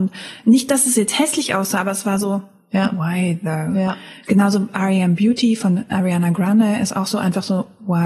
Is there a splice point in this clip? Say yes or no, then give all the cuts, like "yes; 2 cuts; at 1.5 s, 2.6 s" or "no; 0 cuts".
no; 0 cuts